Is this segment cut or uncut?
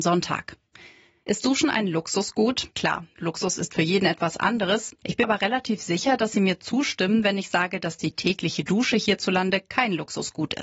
cut